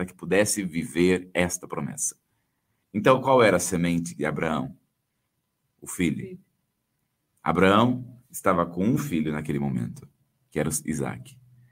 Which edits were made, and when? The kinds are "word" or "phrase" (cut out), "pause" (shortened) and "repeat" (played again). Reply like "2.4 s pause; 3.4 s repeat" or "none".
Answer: none